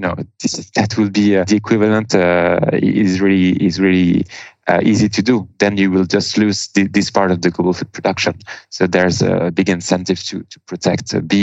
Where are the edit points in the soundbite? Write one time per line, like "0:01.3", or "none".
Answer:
none

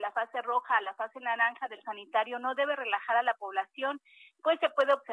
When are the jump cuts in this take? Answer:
0:01.8

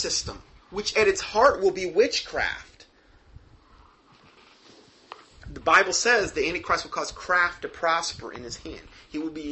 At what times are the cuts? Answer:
none

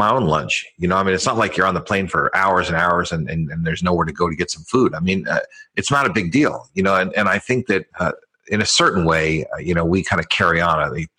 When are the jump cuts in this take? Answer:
0:07.9

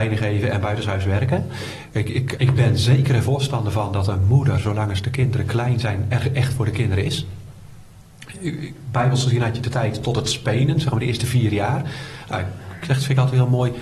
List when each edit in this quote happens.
0:02.4

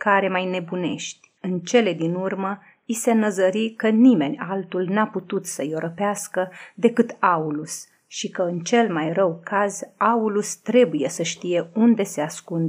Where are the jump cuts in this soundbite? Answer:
0:01.4

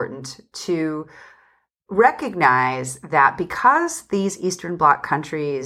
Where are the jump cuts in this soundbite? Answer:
none

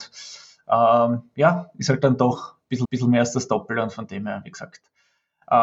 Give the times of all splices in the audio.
0:02.8

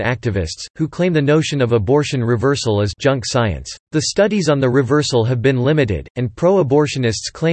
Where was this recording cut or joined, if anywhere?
0:03.8

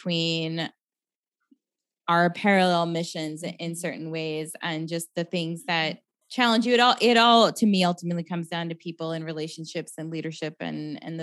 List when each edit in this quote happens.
0:06.2

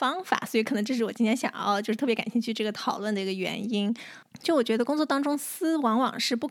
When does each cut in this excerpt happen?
none

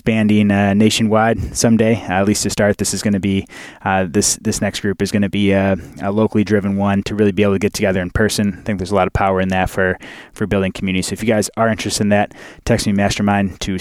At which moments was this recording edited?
0:07.0

